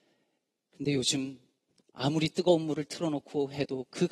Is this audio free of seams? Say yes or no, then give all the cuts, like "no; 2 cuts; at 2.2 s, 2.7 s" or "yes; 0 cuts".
yes; 0 cuts